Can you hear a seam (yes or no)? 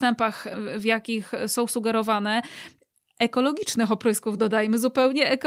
no